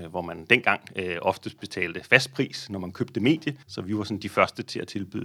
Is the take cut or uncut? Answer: cut